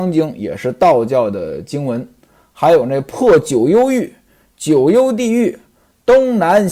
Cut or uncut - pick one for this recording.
uncut